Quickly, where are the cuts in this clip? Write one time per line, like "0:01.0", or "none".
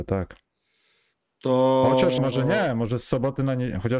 0:02.2